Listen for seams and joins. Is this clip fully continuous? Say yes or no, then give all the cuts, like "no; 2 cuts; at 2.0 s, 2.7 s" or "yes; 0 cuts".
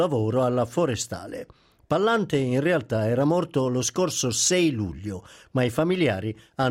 yes; 0 cuts